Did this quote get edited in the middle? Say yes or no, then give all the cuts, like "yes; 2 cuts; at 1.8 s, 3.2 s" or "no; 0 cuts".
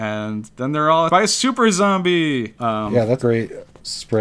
yes; 3 cuts; at 1.1 s, 2.6 s, 3.2 s